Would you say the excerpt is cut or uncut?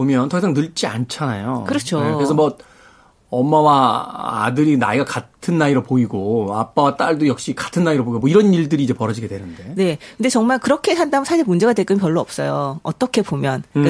uncut